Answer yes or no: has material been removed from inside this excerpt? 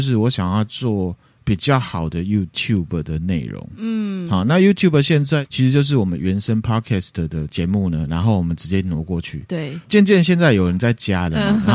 no